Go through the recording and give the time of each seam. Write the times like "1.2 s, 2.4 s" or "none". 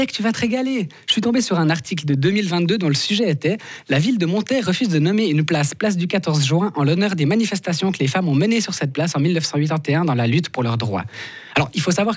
none